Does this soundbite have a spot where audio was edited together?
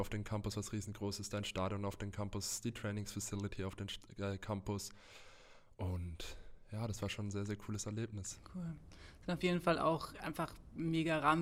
no; 0 cuts

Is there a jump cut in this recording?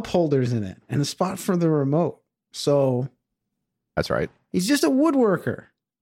no; 0 cuts

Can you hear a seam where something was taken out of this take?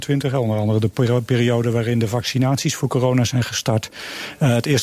no; 0 cuts

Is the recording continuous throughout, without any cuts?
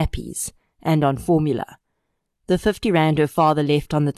yes; 0 cuts

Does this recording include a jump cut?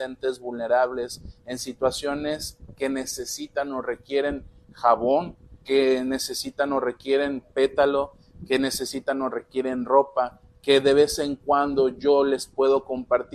yes; 1 cut; at 5.6 s

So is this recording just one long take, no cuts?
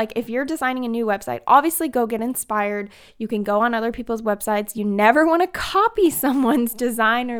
yes; 0 cuts

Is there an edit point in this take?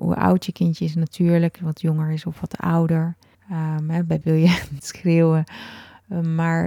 yes; 4 cuts; at 1.6 s, 3.3 s, 4.2 s, 4.8 s

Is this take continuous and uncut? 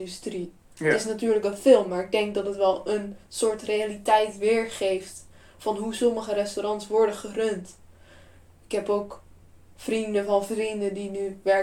yes; 0 cuts

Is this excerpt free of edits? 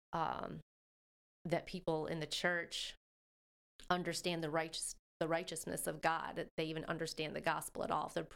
yes; 0 cuts

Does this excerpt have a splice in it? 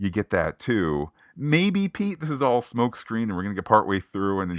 no; 0 cuts

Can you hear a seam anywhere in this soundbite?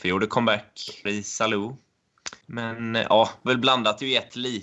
yes; 3 cuts; at 1.1 s, 2.4 s, 3.5 s

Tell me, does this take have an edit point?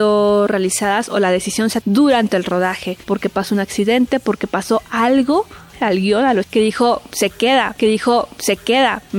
yes; 5 cuts; at 1.8 s, 3.0 s, 5.7 s, 6.4 s, 7.8 s

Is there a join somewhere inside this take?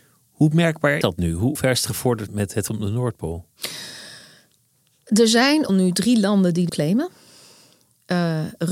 yes; 6 cuts; at 1.0 s, 1.6 s, 2.3 s, 2.7 s, 5.7 s, 6.7 s

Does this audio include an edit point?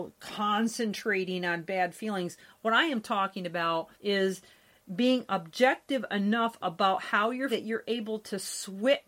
yes; 2 cuts; at 3.9 s, 7.5 s

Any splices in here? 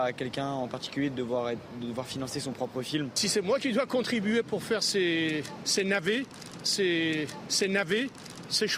yes; 1 cut; at 6.6 s

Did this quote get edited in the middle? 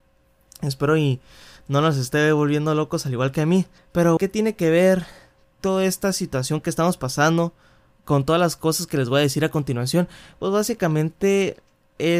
yes; 1 cut; at 4.2 s

